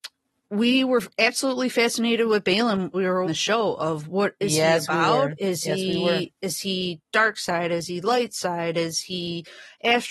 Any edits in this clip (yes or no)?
yes